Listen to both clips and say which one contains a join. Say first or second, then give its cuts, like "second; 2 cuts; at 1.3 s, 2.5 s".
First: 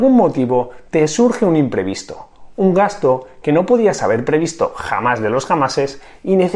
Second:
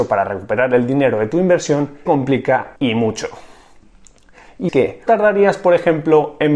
second; 4 cuts; at 2.1 s, 2.8 s, 4.7 s, 5.1 s